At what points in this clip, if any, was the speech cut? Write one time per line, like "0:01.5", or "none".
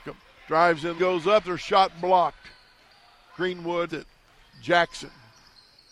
0:01.0
0:01.4
0:03.9